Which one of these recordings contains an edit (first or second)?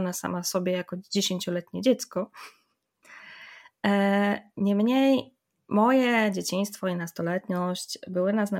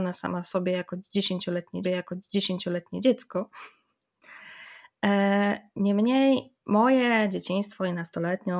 second